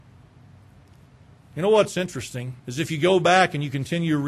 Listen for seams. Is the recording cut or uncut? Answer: cut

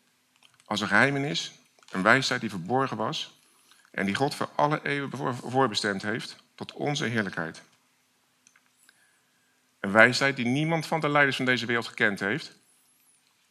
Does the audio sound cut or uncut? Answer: uncut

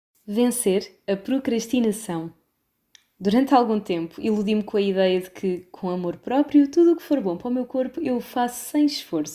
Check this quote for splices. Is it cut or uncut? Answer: uncut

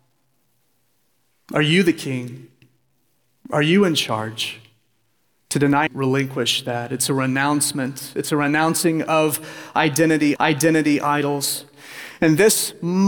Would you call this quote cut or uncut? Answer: cut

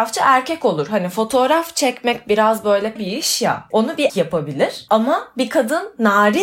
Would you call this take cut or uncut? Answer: cut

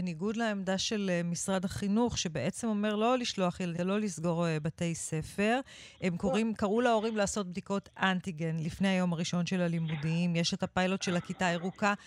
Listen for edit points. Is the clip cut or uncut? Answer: cut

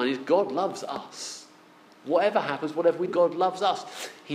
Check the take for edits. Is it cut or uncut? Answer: cut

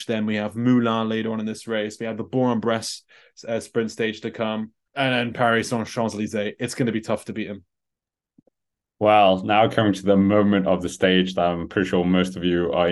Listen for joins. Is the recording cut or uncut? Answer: uncut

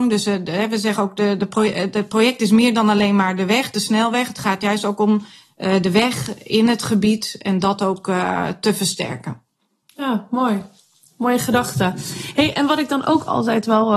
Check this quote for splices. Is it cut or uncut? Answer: uncut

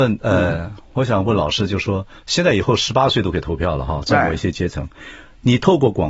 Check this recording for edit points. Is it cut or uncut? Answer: uncut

